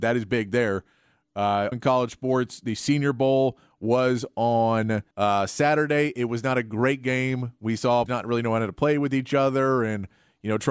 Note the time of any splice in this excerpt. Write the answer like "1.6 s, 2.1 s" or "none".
1.7 s, 5.1 s, 8.1 s